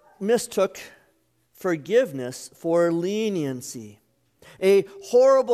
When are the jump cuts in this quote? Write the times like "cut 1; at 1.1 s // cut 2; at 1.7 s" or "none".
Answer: none